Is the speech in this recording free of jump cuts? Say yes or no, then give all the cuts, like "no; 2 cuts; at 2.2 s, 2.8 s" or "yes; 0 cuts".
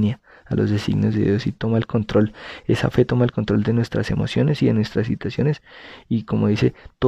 yes; 0 cuts